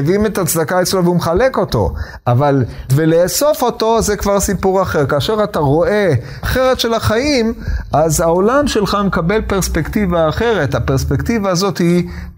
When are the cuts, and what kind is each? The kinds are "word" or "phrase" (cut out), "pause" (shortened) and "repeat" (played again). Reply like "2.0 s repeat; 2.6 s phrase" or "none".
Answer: 2.9 s word; 6.4 s word